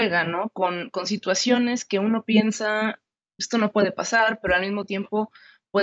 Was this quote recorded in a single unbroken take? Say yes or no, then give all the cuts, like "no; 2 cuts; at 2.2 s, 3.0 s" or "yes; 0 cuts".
yes; 0 cuts